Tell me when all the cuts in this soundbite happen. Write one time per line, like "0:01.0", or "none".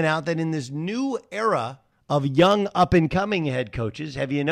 0:01.9